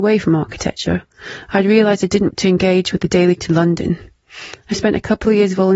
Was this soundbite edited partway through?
yes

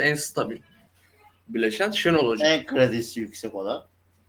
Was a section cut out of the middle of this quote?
no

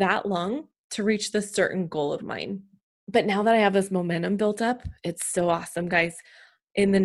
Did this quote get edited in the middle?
yes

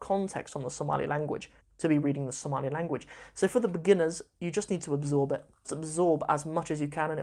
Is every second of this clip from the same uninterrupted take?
no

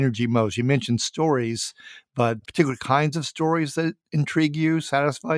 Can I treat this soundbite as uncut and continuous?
no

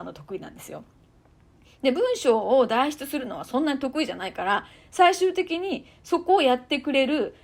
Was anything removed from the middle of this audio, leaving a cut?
no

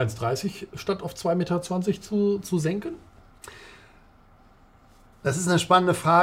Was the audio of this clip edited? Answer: no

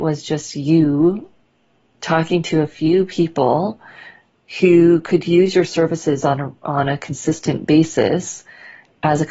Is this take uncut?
yes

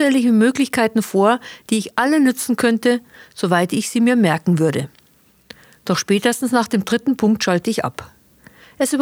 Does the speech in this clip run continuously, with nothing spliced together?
yes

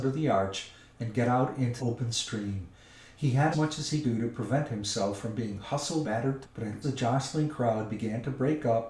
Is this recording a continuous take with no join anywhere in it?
no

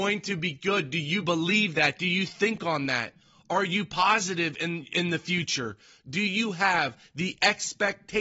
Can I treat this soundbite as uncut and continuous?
yes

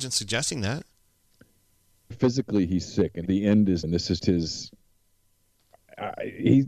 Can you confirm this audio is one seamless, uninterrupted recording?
no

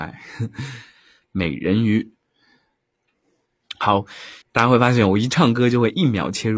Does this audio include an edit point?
yes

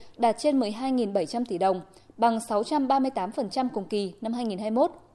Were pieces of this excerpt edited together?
no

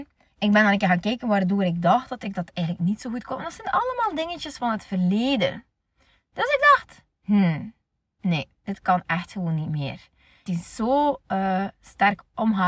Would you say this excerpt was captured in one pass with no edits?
no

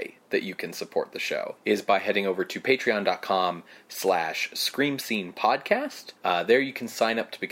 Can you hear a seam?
yes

